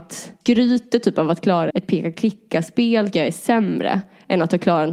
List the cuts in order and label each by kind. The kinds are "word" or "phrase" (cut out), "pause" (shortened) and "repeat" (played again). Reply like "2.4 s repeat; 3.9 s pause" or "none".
1.7 s word; 3.1 s word